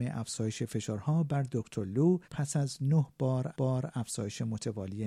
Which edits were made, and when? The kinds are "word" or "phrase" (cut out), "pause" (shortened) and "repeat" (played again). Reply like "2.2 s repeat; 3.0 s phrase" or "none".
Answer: 2.2 s pause; 3.5 s repeat